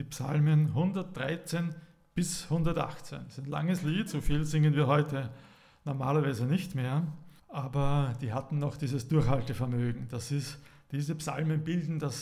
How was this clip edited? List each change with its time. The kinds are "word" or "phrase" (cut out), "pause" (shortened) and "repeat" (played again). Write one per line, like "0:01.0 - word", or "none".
0:07.4 - pause